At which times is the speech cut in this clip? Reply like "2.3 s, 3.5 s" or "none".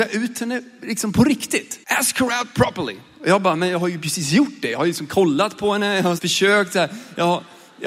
1.8 s, 6.2 s